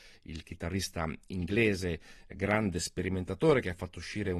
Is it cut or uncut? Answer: uncut